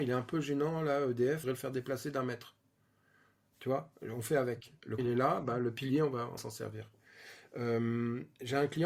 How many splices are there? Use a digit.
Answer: 3